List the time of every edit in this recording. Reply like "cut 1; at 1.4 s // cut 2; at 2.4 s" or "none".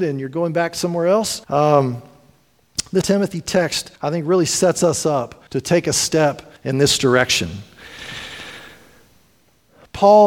cut 1; at 1.4 s // cut 2; at 3.0 s // cut 3; at 4.0 s // cut 4; at 5.5 s // cut 5; at 6.6 s